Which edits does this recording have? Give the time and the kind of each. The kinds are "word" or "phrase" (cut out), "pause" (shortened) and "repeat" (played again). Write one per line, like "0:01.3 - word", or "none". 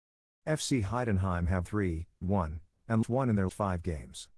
0:01.6 - word
0:02.2 - word
0:03.0 - word
0:03.5 - word